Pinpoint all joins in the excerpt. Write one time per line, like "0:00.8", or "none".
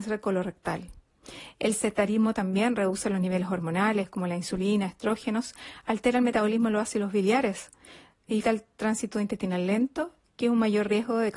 0:08.4